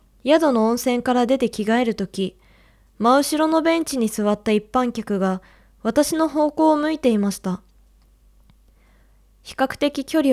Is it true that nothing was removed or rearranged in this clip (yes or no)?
yes